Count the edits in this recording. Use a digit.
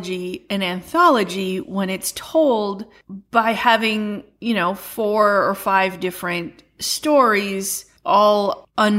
0